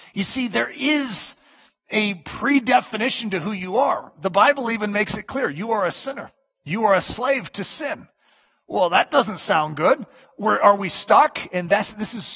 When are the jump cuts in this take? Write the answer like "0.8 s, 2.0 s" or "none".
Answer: none